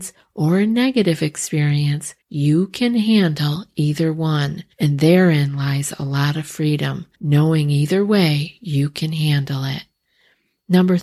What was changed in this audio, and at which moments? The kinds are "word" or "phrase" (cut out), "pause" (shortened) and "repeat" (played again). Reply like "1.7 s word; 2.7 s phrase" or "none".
2.2 s pause; 4.7 s pause; 7.1 s pause